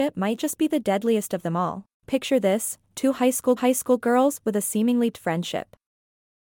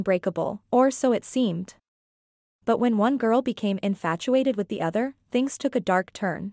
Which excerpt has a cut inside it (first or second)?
first